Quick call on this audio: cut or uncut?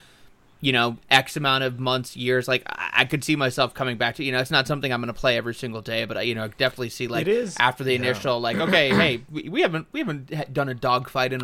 uncut